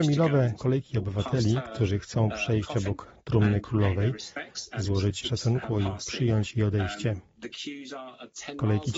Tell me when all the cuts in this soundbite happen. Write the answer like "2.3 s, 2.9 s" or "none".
5.2 s